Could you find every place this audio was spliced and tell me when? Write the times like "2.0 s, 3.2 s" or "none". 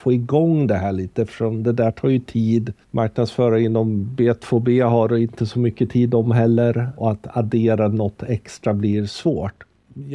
2.8 s